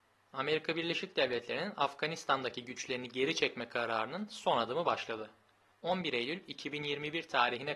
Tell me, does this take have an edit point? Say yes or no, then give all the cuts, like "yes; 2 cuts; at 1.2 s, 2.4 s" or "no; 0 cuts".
no; 0 cuts